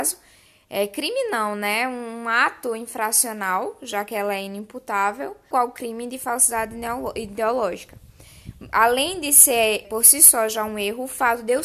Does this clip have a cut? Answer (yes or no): yes